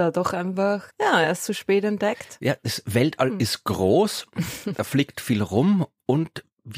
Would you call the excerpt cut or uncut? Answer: uncut